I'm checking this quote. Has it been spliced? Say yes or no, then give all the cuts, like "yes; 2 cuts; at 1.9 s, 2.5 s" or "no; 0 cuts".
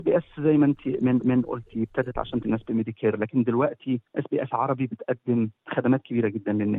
yes; 4 cuts; at 1.2 s, 2.4 s, 4.1 s, 5.6 s